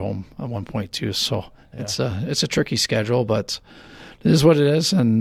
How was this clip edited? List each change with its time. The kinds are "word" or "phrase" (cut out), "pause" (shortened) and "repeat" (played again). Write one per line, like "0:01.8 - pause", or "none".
none